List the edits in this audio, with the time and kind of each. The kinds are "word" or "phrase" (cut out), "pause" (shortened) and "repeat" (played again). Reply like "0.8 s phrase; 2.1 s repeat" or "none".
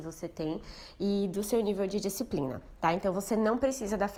none